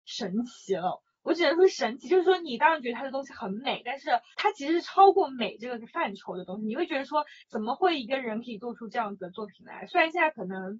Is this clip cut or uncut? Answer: cut